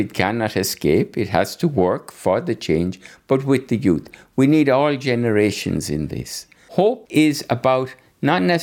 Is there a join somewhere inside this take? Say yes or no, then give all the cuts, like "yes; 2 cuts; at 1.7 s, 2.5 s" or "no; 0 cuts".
no; 0 cuts